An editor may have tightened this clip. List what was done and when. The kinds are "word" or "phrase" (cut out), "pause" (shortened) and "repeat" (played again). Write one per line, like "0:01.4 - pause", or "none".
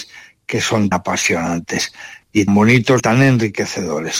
0:00.9 - word
0:02.5 - word
0:03.0 - word